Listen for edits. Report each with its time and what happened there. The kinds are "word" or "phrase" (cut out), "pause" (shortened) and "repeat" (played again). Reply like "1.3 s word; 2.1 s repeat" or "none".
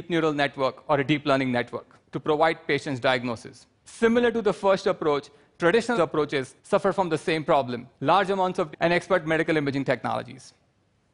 2.0 s pause; 3.7 s pause; 5.9 s phrase; 6.6 s pause; 7.9 s pause; 8.7 s phrase